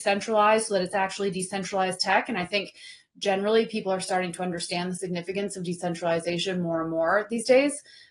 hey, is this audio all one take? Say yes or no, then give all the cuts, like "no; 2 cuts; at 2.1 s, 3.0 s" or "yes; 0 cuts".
yes; 0 cuts